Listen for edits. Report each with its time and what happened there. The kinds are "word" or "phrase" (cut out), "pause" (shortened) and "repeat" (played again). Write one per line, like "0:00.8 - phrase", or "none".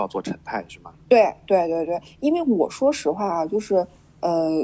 none